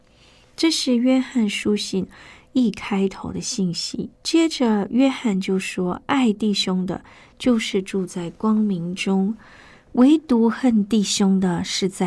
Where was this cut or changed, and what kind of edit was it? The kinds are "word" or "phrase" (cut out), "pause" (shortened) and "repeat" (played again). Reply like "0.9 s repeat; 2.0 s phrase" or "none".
4.1 s pause

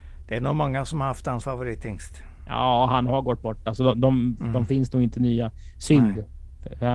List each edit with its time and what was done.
1.4 s word

